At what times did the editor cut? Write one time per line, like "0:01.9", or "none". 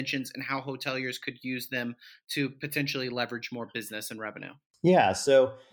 none